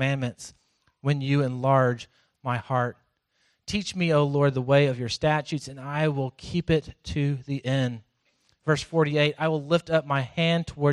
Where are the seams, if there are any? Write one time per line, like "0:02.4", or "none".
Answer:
none